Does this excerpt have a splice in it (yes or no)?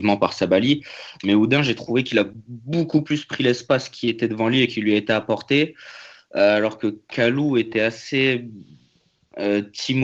no